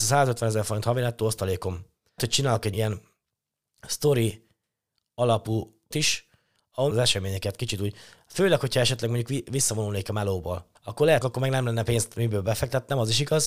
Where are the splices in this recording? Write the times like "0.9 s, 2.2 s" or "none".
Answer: 2.2 s, 2.7 s, 5.9 s, 6.9 s, 10.8 s, 11.2 s

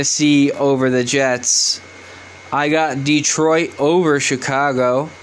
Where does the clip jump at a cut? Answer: none

